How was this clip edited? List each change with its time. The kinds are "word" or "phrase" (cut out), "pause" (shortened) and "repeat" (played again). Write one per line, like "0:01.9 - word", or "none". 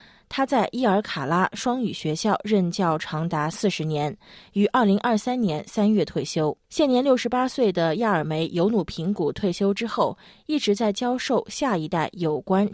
0:06.6 - pause

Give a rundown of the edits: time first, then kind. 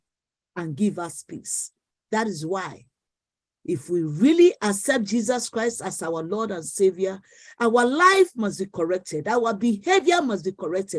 none

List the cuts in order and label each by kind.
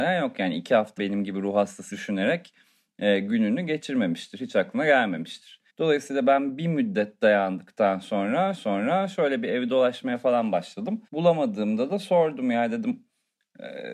0:01.0 - word
0:01.9 - phrase
0:05.7 - pause
0:08.5 - repeat
0:11.1 - pause

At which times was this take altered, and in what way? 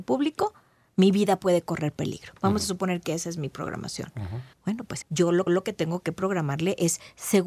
0:04.5 - pause
0:05.0 - word
0:05.5 - repeat

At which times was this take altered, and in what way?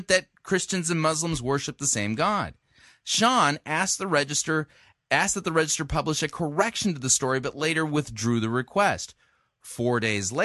none

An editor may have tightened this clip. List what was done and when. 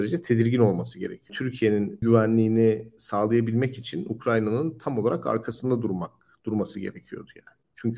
0:02.0 - word

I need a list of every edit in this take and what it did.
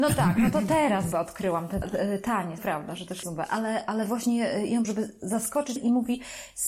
0:01.1 - word
0:01.8 - word
0:02.6 - word
0:03.2 - word
0:04.8 - word
0:05.8 - word

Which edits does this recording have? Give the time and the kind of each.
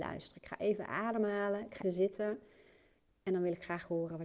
0:01.8 - word

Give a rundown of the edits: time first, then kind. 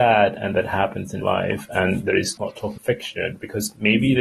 0:01.2 - word
0:02.4 - word
0:02.8 - word

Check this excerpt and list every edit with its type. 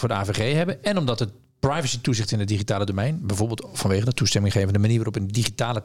none

